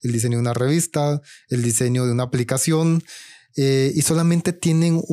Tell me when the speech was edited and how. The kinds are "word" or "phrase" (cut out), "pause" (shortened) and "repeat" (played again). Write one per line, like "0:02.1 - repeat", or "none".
none

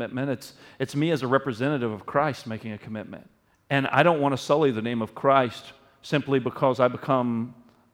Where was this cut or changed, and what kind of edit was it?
0:03.5 - pause

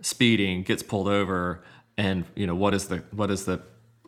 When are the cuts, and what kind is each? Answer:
none

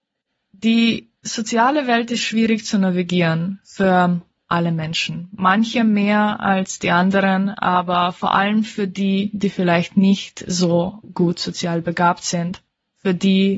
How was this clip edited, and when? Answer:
none

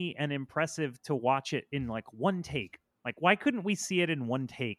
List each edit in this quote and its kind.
none

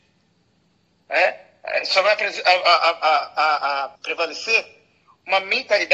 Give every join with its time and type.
0:04.0 - pause

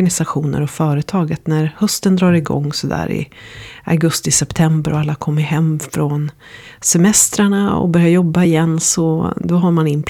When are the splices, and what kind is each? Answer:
none

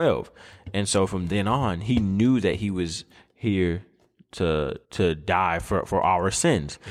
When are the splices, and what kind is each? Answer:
0:04.8 - pause

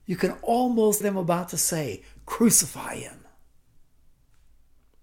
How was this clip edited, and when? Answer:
0:01.0 - word

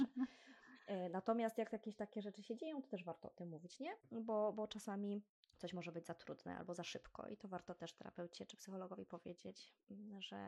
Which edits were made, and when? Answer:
0:04.0 - pause
0:05.4 - pause

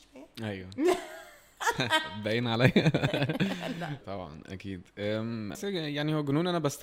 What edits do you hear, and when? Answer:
0:04.0 - word
0:05.5 - word

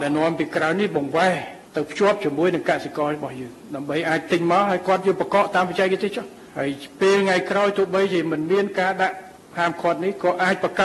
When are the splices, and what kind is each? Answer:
0:01.7 - pause
0:06.5 - pause

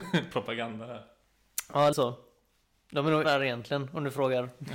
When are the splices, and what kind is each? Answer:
0:01.9 - word
0:03.2 - word

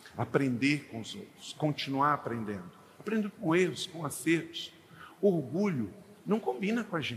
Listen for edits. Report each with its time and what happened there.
none

